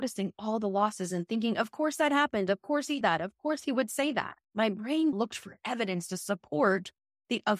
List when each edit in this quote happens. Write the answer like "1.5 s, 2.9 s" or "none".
3.0 s, 4.4 s, 5.1 s